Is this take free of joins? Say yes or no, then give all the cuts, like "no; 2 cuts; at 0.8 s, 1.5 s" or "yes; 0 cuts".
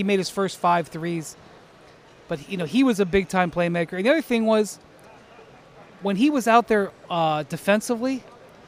yes; 0 cuts